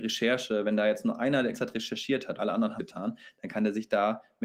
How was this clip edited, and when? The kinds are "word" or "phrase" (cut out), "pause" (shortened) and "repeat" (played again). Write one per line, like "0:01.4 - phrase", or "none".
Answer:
0:01.5 - word
0:02.4 - word
0:02.8 - word